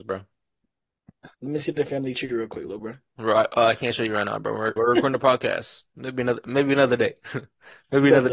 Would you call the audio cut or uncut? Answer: cut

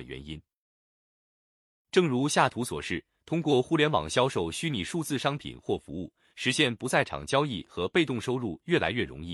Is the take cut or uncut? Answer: uncut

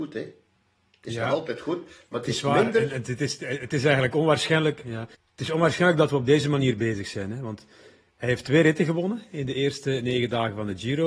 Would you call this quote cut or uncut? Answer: cut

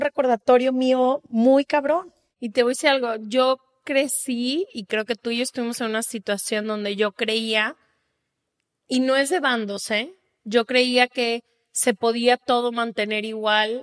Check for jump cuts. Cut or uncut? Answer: uncut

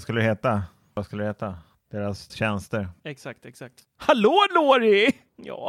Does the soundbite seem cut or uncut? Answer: cut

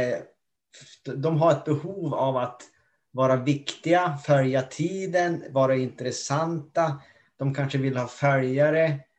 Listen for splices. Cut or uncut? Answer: uncut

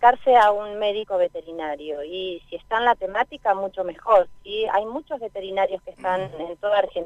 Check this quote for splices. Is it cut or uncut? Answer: uncut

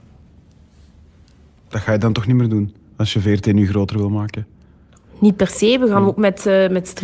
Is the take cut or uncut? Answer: uncut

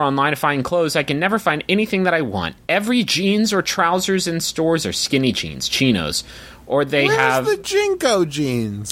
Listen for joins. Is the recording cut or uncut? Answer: uncut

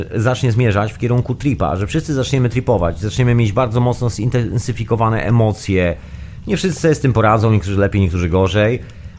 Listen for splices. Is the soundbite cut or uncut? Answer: uncut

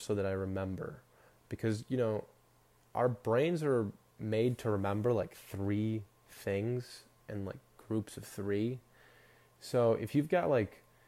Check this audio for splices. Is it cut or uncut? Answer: uncut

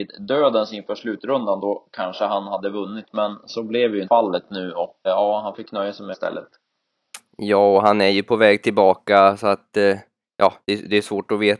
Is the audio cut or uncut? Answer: cut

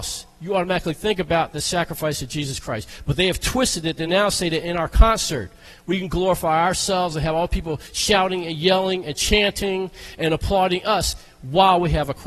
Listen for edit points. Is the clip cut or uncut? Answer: uncut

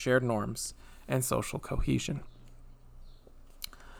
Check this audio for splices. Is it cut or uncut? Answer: uncut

